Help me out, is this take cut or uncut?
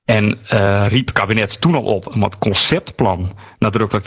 cut